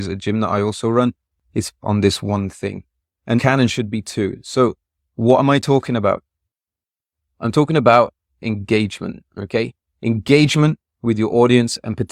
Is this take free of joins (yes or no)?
no